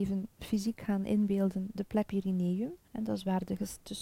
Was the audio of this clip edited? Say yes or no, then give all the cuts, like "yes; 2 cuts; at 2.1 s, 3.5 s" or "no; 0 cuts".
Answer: yes; 2 cuts; at 2.1 s, 2.8 s